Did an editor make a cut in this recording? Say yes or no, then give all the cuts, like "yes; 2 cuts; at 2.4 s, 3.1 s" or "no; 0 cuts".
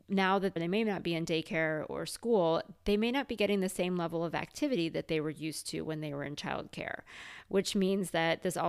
no; 0 cuts